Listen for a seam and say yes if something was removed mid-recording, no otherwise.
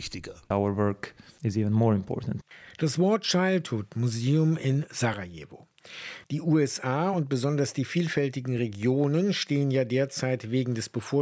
no